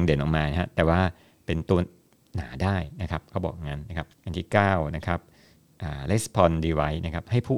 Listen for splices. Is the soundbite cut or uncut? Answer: cut